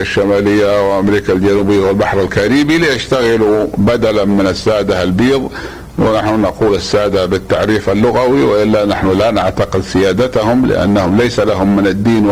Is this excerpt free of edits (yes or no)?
yes